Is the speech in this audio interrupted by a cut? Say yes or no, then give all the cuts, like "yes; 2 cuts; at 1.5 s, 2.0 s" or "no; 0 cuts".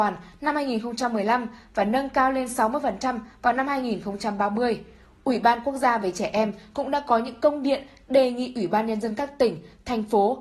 no; 0 cuts